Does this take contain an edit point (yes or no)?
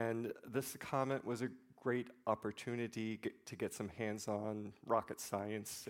no